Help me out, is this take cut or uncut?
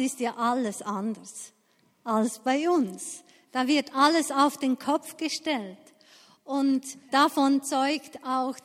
cut